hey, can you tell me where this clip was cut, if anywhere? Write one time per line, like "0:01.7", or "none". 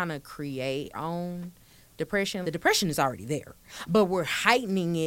0:00.9
0:02.4

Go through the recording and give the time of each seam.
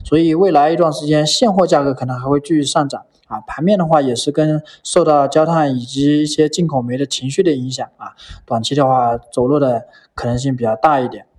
none

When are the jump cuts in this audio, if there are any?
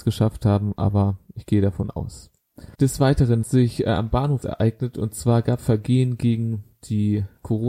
0:02.7
0:03.4
0:04.4
0:05.6

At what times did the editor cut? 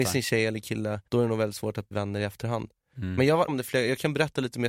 0:01.1
0:01.9
0:03.5

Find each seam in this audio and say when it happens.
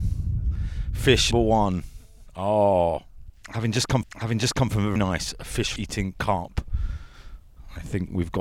0:01.3
0:04.0
0:05.0
0:05.8

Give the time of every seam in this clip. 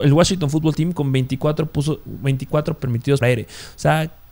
0:02.8
0:03.2

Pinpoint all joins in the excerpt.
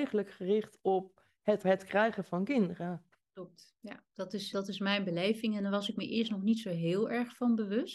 0:01.6
0:03.8
0:04.5

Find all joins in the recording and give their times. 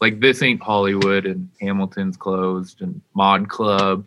0:01.5
0:03.1

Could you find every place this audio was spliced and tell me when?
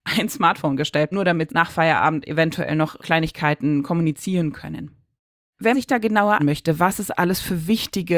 0:01.1
0:01.5
0:03.0
0:05.7
0:06.4

